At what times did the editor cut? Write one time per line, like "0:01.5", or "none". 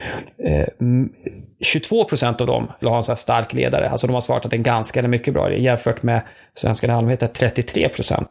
0:02.8